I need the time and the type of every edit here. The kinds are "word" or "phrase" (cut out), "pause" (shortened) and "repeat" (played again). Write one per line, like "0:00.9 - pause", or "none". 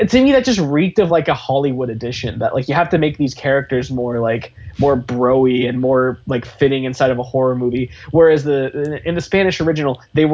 none